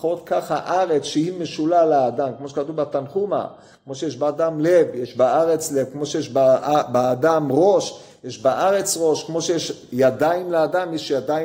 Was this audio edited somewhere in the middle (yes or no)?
no